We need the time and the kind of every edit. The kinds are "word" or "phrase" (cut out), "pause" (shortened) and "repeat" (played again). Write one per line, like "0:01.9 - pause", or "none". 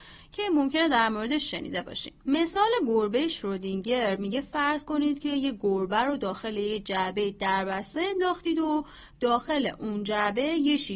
0:02.2 - pause